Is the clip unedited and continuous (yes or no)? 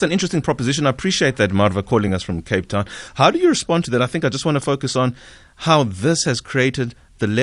yes